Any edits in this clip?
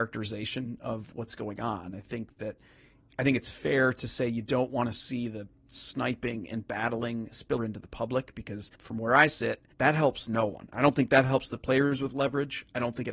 yes; 3 cuts; at 7.6 s, 8.8 s, 9.7 s

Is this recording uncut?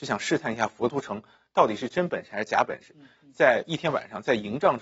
yes; 0 cuts

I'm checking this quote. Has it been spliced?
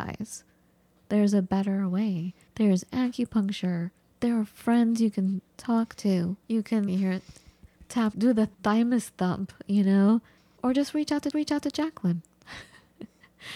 yes; 8 cuts; at 2.5 s, 4.0 s, 6.4 s, 6.9 s, 8.1 s, 8.5 s, 10.4 s, 11.3 s

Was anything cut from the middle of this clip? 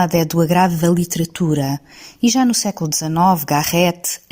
no; 0 cuts

